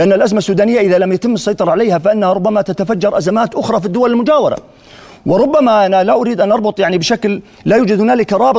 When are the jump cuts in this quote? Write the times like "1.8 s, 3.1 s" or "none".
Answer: none